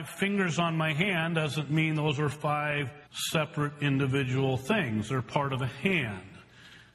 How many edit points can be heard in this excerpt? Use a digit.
1